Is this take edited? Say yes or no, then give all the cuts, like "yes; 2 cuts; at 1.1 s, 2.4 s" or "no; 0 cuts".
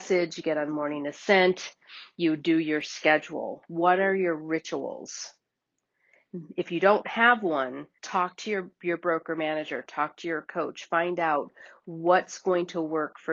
yes; 1 cut; at 8.0 s